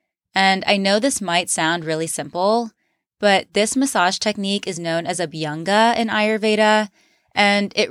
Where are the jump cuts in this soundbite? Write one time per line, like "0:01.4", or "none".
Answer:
none